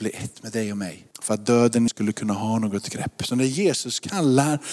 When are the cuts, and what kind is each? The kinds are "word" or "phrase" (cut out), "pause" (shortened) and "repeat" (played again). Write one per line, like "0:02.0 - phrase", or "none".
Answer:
0:01.1 - pause
0:01.9 - phrase